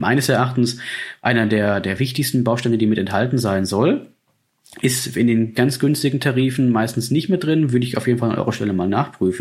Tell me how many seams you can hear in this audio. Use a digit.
0